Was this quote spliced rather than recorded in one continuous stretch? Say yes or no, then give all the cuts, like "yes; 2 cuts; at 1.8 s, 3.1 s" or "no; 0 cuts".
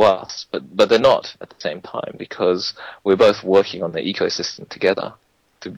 no; 0 cuts